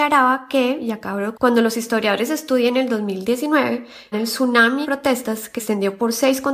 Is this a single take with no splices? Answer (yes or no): no